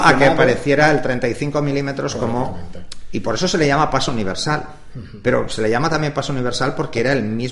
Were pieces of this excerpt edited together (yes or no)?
no